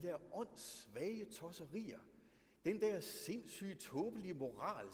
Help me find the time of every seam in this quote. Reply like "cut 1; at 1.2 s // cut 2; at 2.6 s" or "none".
none